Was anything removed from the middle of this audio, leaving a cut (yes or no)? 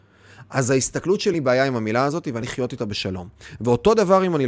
yes